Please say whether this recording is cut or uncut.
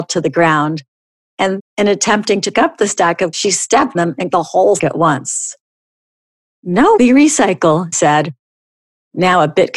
cut